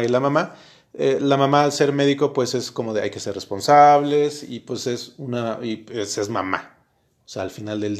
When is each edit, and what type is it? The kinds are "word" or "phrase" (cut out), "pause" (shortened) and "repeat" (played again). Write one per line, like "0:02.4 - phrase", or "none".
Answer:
none